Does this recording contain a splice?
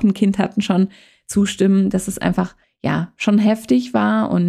no; 0 cuts

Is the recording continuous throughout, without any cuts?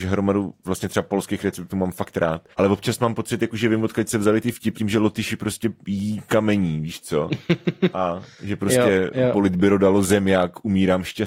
no; 2 cuts; at 2.5 s, 4.7 s

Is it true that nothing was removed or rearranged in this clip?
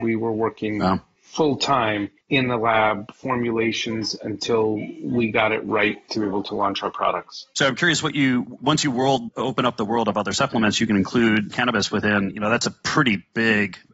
yes; 0 cuts

